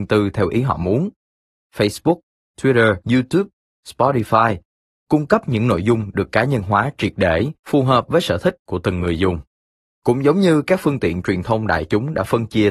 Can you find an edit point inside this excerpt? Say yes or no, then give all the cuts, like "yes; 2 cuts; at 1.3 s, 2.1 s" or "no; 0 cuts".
yes; 3 cuts; at 3.0 s, 7.6 s, 9.8 s